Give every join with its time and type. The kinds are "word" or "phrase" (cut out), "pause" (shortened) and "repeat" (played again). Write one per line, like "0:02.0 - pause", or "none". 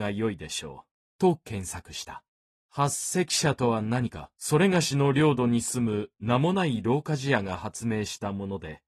0:01.0 - pause
0:02.5 - pause
0:04.4 - pause